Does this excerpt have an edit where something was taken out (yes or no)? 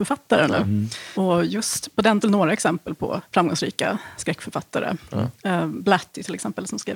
yes